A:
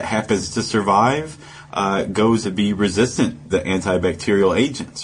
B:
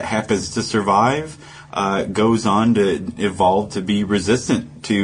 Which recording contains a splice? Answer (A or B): A